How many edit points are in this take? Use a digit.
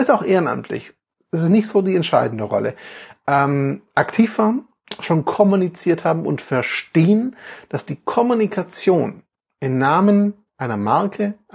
0